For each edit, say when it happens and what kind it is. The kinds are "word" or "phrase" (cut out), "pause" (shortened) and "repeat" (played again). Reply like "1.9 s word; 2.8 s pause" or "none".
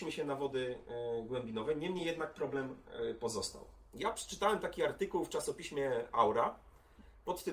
none